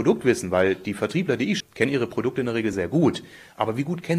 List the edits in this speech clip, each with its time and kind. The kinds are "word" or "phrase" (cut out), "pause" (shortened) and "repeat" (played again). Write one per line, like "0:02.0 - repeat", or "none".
0:01.6 - word
0:02.7 - word